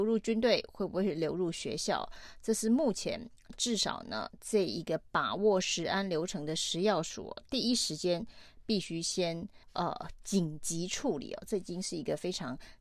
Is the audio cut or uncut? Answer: cut